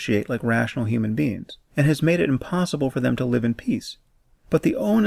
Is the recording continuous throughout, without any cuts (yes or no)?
yes